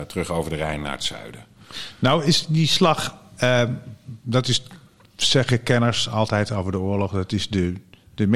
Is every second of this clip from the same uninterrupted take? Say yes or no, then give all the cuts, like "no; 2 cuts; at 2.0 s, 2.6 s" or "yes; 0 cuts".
yes; 0 cuts